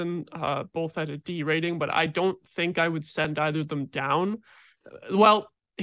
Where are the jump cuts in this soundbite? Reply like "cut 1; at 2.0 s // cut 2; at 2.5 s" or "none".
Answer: none